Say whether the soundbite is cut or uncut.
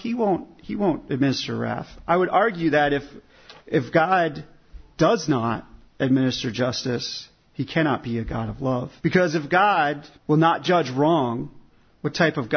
cut